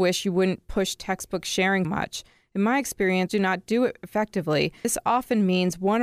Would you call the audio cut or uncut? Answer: cut